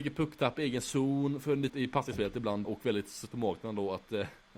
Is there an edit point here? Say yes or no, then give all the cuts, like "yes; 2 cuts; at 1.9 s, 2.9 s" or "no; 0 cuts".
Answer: yes; 3 cuts; at 1.7 s, 2.6 s, 3.3 s